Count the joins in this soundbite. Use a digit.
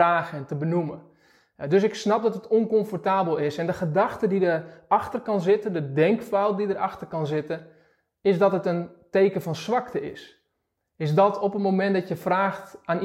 0